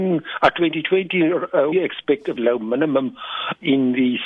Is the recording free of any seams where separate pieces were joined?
no; 2 cuts; at 1.7 s, 2.4 s

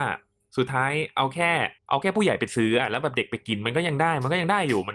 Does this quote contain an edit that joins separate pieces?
yes; 1 cut; at 1.8 s

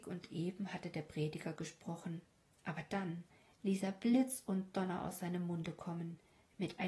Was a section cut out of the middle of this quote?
no; 0 cuts

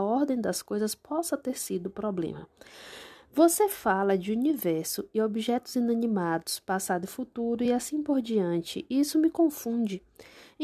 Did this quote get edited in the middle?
no; 0 cuts

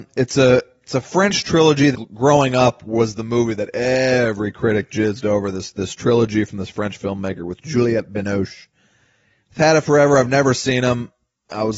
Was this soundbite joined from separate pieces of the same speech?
yes; 1 cut; at 1.9 s

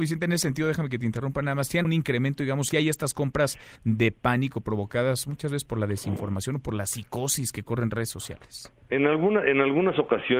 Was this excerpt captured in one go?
no; 3 cuts; at 1.8 s, 2.7 s, 3.8 s

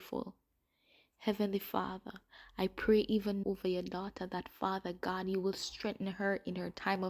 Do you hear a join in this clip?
yes; 1 cut; at 3.4 s

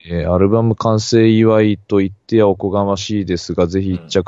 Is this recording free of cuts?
no; 1 cut; at 2.2 s

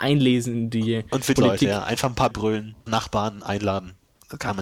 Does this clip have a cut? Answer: yes; 3 cuts; at 1.4 s, 2.3 s, 2.9 s

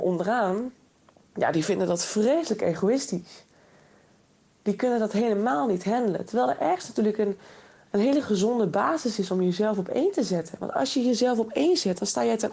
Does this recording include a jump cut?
no; 0 cuts

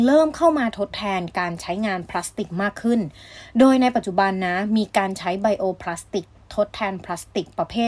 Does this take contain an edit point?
no; 0 cuts

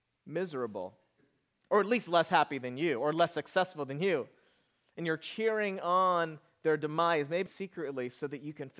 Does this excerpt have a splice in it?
yes; 1 cut; at 7.5 s

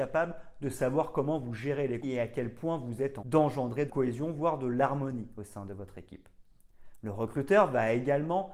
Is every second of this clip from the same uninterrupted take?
no; 3 cuts; at 2.0 s, 3.2 s, 3.9 s

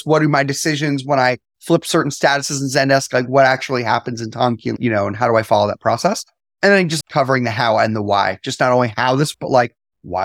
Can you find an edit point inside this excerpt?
yes; 2 cuts; at 7.0 s, 9.3 s

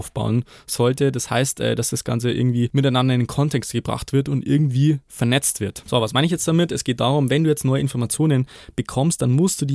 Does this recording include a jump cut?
no; 0 cuts

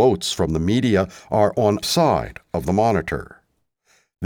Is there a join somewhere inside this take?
yes; 1 cut; at 1.8 s

